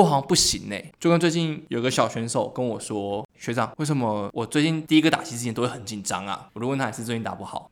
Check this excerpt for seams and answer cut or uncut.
cut